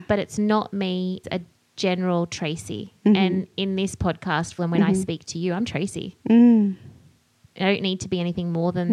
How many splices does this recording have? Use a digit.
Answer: 2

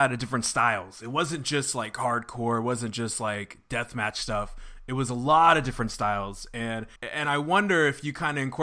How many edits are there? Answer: 1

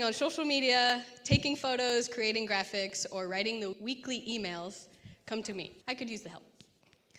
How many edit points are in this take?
3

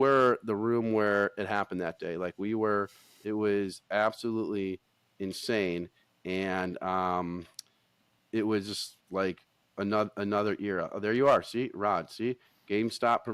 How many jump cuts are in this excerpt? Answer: 0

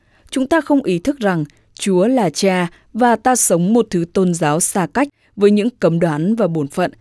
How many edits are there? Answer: 0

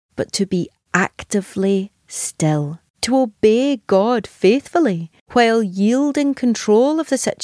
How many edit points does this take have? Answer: 2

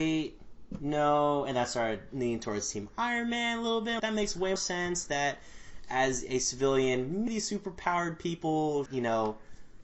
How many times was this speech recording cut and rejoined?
4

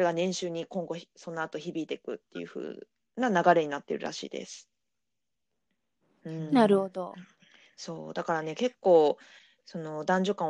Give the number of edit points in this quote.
0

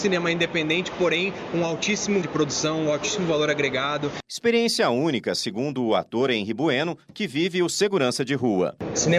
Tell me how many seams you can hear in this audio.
1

